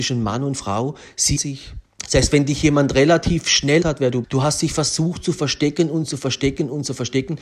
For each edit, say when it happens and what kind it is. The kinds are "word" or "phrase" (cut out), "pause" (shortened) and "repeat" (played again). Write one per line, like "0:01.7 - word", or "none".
0:01.4 - word
0:01.9 - pause
0:03.8 - word
0:04.2 - word